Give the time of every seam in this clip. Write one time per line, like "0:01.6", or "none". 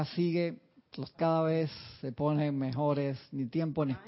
0:01.1